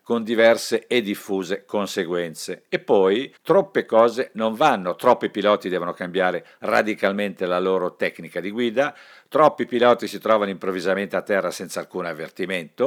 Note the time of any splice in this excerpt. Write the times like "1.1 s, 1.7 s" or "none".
3.4 s